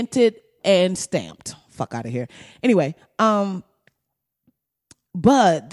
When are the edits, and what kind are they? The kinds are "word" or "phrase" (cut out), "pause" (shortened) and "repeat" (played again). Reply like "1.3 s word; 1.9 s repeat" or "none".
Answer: none